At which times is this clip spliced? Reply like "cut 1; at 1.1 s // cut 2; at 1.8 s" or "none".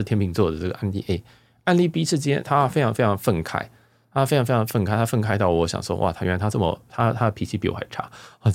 none